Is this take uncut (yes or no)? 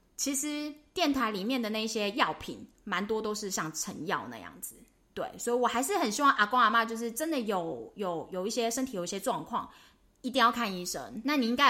yes